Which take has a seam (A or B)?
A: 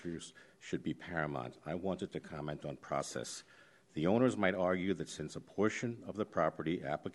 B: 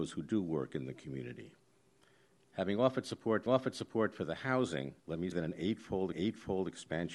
B